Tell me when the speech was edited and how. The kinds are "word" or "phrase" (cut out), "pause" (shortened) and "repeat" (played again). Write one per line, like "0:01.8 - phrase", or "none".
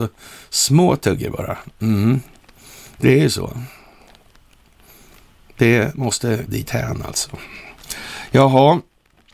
0:06.5 - word

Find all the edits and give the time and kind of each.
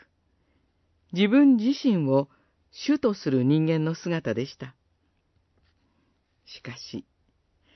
none

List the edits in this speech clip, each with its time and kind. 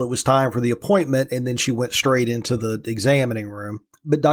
none

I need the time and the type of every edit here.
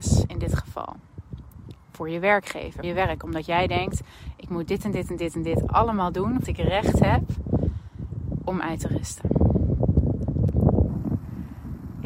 0:02.8 - word
0:06.4 - word

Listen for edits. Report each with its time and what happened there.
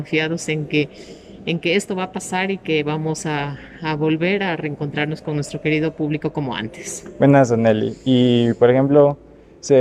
none

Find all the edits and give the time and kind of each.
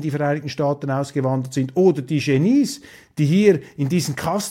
none

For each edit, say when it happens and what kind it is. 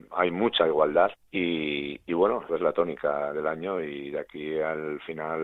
0:01.2 - pause
0:02.5 - phrase

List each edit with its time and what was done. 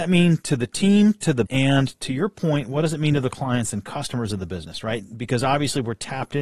0:01.5 - word

